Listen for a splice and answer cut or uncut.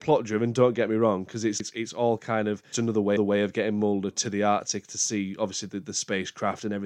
cut